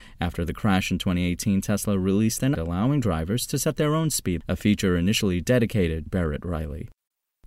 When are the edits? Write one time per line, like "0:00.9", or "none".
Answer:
0:02.5
0:04.4
0:06.1